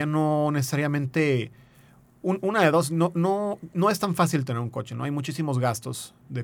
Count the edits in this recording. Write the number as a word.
zero